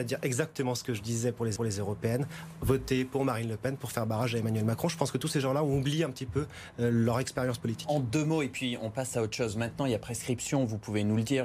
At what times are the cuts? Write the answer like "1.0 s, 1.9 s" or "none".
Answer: 1.6 s

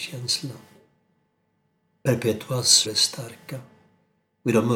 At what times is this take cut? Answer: 2.8 s

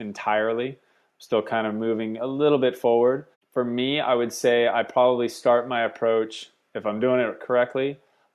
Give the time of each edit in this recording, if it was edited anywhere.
3.3 s

